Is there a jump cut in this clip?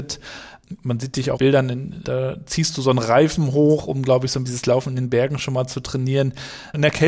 yes; 2 cuts; at 1.4 s, 4.5 s

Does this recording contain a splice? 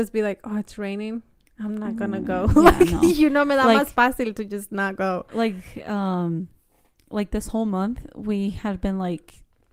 no; 0 cuts

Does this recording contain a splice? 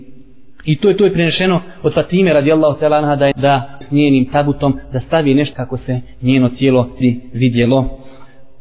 yes; 5 cuts; at 1.0 s, 3.3 s, 3.8 s, 5.5 s, 7.0 s

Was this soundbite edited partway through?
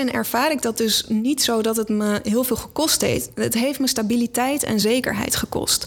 no; 0 cuts

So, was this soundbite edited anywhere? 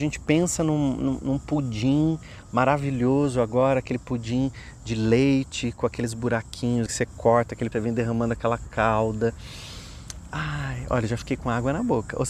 yes; 2 cuts; at 6.9 s, 7.7 s

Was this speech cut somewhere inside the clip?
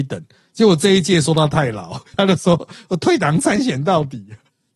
yes; 1 cut; at 2.1 s

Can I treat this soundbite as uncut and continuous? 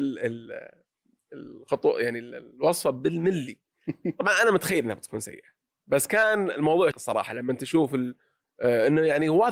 no; 1 cut; at 6.9 s

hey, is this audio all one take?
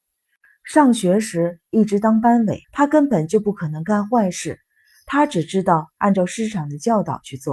no; 1 cut; at 2.6 s

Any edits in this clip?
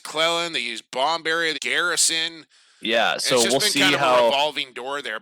yes; 1 cut; at 1.5 s

